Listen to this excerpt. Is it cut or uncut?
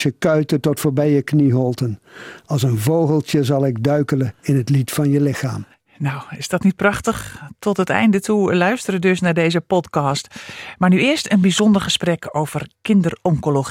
cut